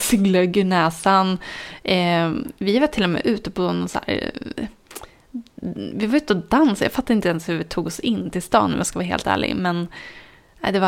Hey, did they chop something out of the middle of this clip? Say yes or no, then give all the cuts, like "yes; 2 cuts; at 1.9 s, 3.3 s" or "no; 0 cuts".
no; 0 cuts